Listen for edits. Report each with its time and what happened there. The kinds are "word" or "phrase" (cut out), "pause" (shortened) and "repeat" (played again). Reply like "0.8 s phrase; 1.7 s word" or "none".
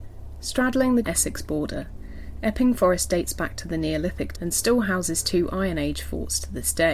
1.0 s phrase; 4.3 s word